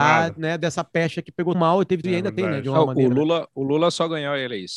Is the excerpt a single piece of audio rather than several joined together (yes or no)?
no